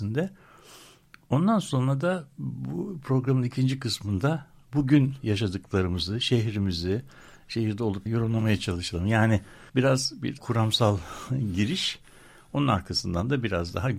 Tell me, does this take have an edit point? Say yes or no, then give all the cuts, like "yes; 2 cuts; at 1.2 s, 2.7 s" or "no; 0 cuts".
yes; 3 cuts; at 8.1 s, 9.7 s, 10.4 s